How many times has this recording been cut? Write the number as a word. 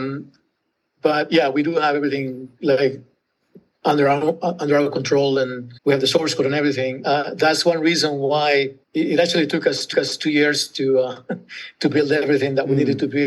three